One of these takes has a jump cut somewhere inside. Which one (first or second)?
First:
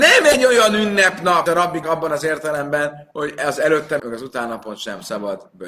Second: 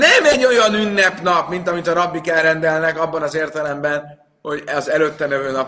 first